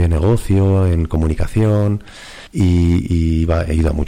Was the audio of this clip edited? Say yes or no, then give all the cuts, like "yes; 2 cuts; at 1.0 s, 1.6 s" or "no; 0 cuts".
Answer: yes; 1 cut; at 2.5 s